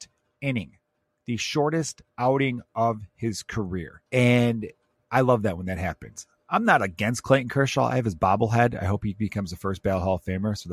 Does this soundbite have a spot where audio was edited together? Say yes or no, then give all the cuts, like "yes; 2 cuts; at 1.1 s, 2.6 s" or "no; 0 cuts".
yes; 1 cut; at 4.1 s